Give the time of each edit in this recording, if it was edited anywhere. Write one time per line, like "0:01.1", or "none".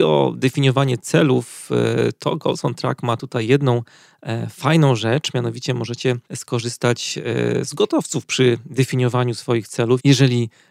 0:06.2